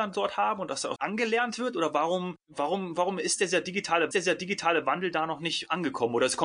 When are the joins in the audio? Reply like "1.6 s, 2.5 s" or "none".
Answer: 1.0 s, 4.1 s